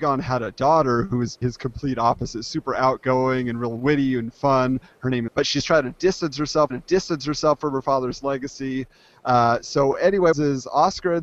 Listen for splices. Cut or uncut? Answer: cut